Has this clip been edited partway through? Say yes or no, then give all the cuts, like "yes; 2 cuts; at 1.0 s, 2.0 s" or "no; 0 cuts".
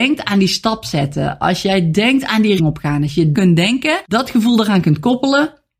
yes; 3 cuts; at 2.6 s, 3.3 s, 4.0 s